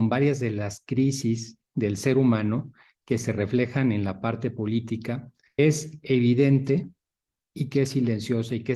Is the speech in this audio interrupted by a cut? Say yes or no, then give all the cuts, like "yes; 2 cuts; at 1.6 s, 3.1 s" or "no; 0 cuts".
yes; 1 cut; at 5.6 s